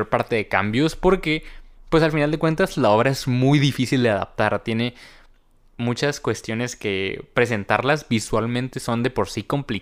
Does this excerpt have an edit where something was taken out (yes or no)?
no